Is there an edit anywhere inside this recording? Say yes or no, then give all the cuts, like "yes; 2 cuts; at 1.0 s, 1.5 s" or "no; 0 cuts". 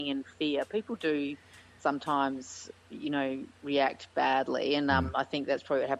no; 0 cuts